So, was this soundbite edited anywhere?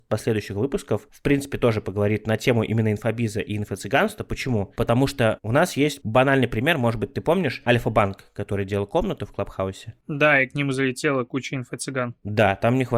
no; 0 cuts

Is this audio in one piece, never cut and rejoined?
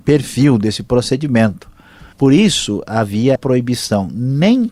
no; 2 cuts; at 2.1 s, 3.4 s

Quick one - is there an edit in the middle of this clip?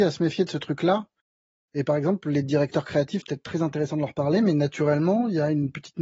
yes; 1 cut; at 3.2 s

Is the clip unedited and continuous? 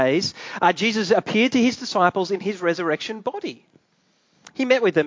yes; 0 cuts

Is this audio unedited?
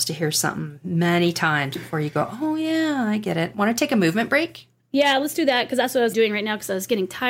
no; 1 cut; at 6.1 s

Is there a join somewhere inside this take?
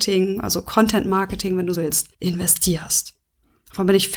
yes; 2 cuts; at 1.7 s, 2.1 s

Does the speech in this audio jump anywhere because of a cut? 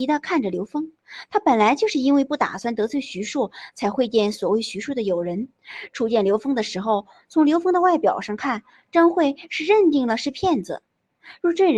no; 0 cuts

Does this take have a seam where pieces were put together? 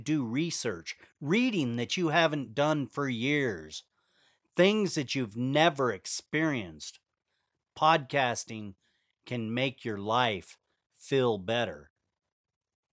no; 0 cuts

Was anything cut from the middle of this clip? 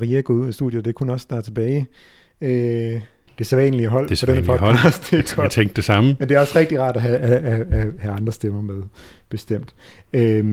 no; 0 cuts

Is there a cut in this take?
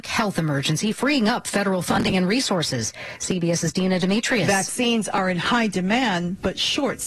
no; 0 cuts

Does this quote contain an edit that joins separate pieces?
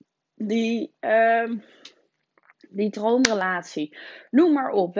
no; 0 cuts

